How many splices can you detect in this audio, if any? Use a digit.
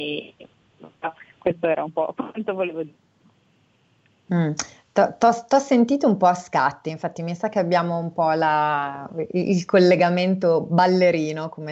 0